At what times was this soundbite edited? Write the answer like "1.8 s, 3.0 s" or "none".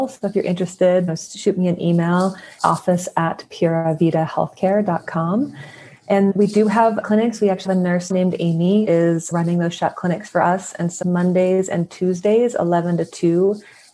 1.1 s, 2.6 s, 6.3 s, 7.0 s, 7.7 s, 8.1 s, 8.9 s, 9.3 s, 11.0 s